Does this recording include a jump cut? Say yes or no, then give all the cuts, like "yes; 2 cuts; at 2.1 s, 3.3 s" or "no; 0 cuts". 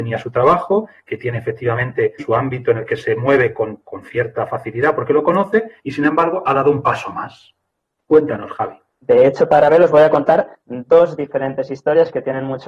yes; 1 cut; at 2.2 s